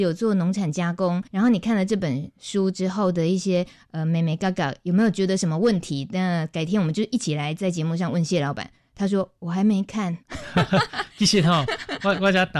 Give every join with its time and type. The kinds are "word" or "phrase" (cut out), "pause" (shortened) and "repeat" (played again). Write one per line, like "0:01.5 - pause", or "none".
0:01.3 - pause
0:10.2 - pause

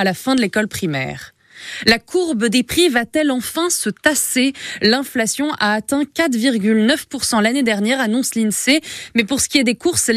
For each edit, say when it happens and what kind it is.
none

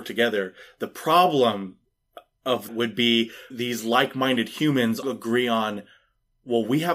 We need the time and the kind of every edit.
0:02.7 - word
0:03.5 - word
0:05.0 - word

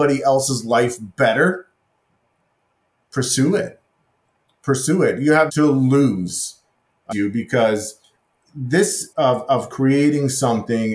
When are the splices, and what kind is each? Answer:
0:05.5 - word
0:07.1 - word
0:09.1 - word

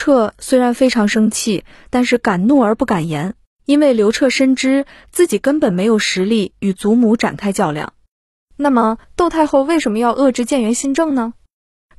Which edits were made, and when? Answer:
0:03.5 - pause
0:09.0 - pause

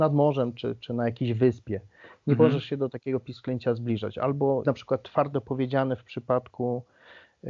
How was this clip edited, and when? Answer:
0:04.6 - word

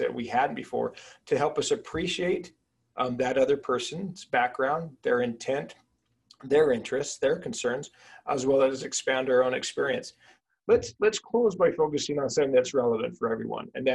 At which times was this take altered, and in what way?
none

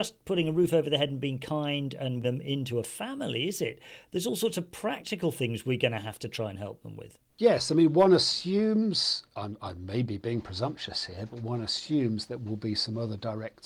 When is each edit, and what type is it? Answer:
0:02.2 - word
0:07.3 - pause

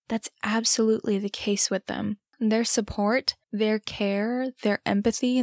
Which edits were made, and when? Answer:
0:02.3 - pause
0:03.4 - pause

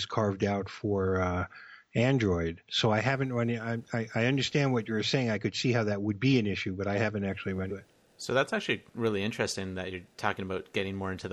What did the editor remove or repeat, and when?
0:07.7 - word

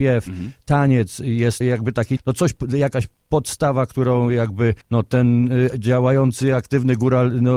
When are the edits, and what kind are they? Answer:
0:01.6 - word
0:02.2 - word
0:04.8 - pause

